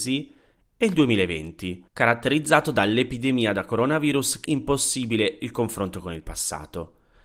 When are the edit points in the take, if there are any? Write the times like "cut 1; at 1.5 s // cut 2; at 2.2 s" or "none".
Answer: cut 1; at 1.9 s // cut 2; at 4.4 s